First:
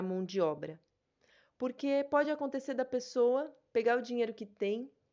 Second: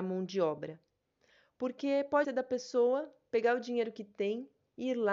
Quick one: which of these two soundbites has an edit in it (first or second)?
second